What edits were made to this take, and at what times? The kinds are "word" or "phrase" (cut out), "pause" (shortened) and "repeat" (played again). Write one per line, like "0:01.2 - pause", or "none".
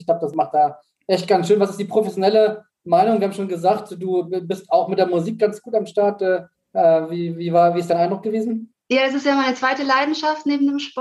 0:06.5 - pause